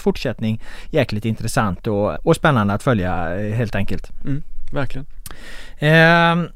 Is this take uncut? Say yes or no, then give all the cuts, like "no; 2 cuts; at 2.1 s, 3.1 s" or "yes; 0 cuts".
no; 1 cut; at 2.2 s